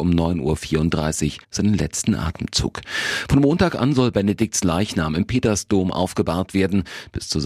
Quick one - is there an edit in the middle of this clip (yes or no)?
yes